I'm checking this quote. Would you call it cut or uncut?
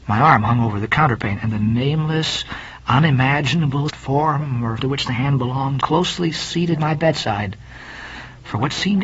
cut